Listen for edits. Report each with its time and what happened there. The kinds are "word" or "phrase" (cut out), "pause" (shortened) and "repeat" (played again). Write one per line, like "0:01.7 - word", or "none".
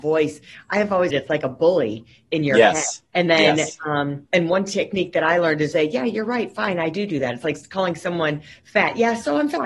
0:01.1 - word
0:03.1 - pause
0:04.3 - pause
0:05.7 - word